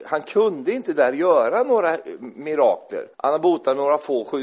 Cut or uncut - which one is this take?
cut